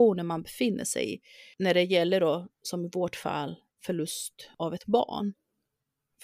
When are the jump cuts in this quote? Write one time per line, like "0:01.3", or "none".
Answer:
none